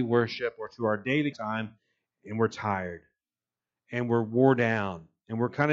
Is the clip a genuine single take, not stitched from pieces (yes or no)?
no